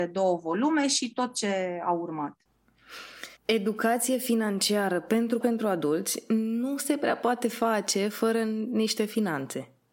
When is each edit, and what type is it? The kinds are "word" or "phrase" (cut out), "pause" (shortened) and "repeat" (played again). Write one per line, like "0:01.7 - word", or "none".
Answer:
0:03.4 - pause
0:05.4 - phrase